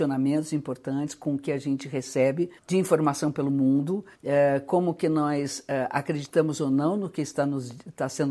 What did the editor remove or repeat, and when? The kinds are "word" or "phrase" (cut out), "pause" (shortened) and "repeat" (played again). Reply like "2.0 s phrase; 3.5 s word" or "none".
2.6 s pause; 4.1 s pause